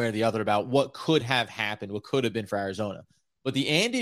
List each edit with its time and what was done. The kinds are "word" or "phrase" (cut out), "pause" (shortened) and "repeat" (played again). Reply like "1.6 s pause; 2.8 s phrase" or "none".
none